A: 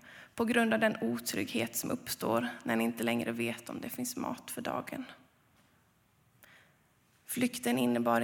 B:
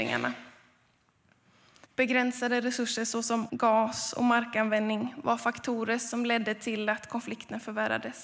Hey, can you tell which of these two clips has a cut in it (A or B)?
B